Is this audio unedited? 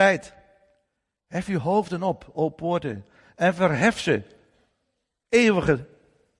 yes; 0 cuts

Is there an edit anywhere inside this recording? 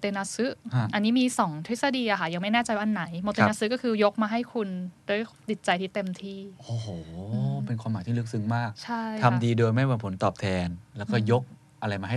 yes; 1 cut; at 5.0 s

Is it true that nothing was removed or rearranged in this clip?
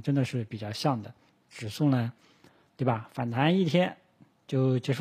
yes; 0 cuts

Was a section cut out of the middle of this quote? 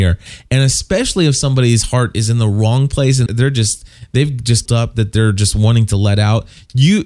yes; 2 cuts; at 3.3 s, 4.7 s

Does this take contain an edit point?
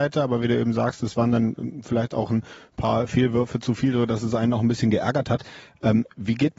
no; 0 cuts

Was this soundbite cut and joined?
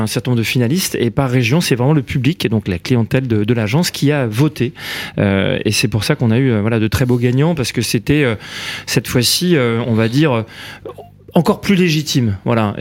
no; 0 cuts

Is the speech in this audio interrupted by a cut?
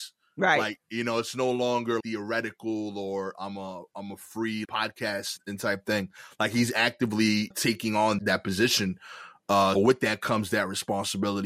yes; 6 cuts; at 2.0 s, 4.6 s, 5.4 s, 7.5 s, 8.2 s, 9.8 s

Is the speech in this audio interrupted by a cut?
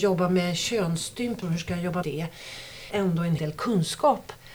yes; 3 cuts; at 2.0 s, 2.9 s, 3.4 s

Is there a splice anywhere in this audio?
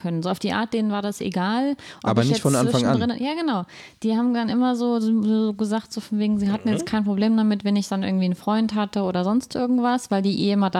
no; 0 cuts

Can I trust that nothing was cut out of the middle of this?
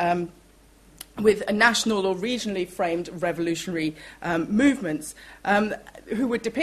yes; 0 cuts

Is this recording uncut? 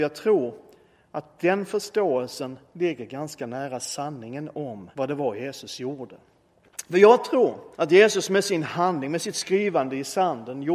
no; 2 cuts; at 4.9 s, 7.7 s

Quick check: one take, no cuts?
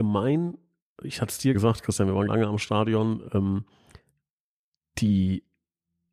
no; 2 cuts; at 1.5 s, 2.3 s

